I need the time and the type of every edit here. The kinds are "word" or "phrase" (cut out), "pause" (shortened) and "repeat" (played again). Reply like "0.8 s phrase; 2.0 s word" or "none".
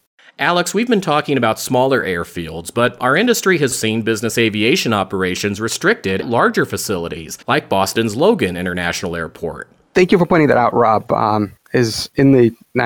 3.7 s word; 6.2 s word; 7.4 s pause; 11.6 s phrase